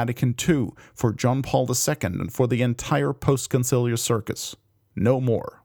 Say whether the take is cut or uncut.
uncut